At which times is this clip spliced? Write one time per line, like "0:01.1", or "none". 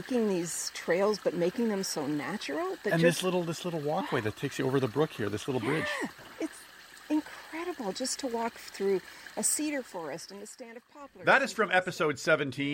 none